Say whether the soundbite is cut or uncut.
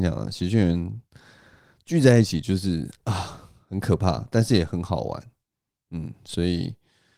uncut